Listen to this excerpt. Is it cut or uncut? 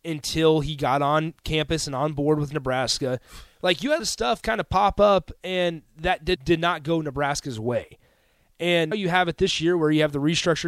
cut